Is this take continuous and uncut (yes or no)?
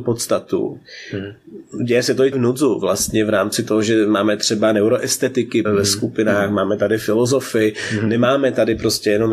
no